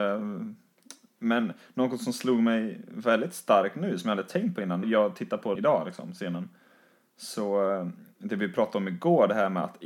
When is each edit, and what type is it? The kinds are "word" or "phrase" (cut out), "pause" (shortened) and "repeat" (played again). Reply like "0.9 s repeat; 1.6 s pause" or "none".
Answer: 4.8 s word; 5.6 s word

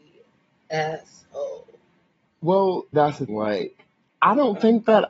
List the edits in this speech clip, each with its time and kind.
2.9 s word; 3.3 s word

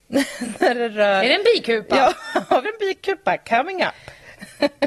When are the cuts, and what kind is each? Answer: 2.7 s word

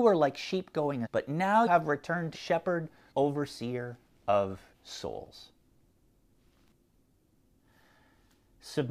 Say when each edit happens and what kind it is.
1.1 s word; 1.7 s word; 2.3 s word; 3.1 s word; 4.7 s word

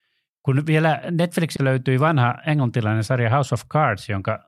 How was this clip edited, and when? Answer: 1.6 s word

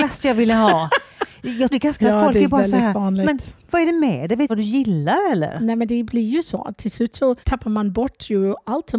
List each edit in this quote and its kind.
1.7 s word; 2.0 s word; 4.5 s phrase; 7.4 s pause

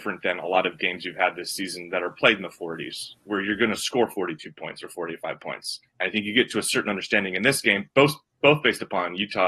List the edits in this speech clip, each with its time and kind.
5.9 s pause

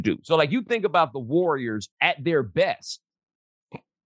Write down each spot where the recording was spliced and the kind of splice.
1.9 s pause

